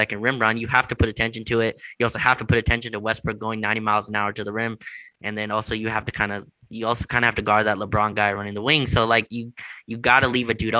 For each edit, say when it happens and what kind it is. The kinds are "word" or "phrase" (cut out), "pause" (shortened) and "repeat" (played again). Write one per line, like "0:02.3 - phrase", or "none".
none